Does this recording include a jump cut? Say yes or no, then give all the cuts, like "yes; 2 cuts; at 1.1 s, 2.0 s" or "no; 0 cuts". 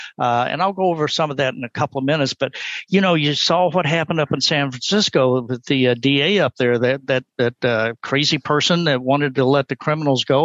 no; 0 cuts